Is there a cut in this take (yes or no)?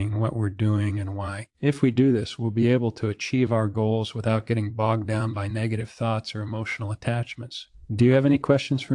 yes